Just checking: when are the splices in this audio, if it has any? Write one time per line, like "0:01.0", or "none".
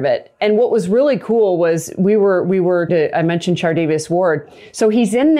0:02.9